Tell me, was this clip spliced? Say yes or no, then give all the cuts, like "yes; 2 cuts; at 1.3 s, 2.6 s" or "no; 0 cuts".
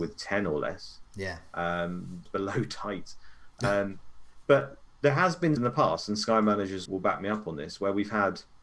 yes; 3 cuts; at 2.3 s, 5.6 s, 6.9 s